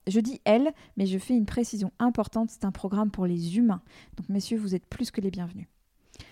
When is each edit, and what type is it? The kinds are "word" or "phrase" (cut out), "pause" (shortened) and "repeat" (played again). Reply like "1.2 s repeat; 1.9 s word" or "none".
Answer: none